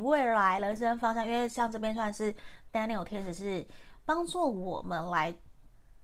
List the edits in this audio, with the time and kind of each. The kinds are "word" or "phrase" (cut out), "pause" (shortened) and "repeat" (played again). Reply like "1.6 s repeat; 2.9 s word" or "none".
none